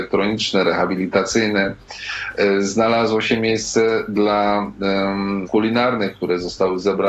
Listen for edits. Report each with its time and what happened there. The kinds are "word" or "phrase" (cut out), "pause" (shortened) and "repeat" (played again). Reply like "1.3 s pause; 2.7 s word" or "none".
5.5 s word